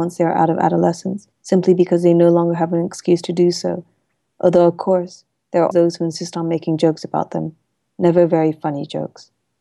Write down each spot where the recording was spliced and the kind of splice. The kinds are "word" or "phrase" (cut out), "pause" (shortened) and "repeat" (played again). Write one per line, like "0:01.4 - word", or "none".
0:01.3 - pause
0:05.7 - word